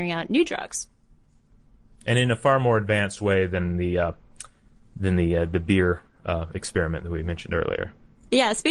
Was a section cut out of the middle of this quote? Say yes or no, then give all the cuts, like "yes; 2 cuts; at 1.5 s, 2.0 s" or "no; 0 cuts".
no; 0 cuts